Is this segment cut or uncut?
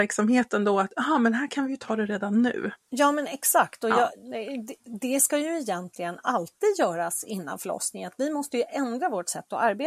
cut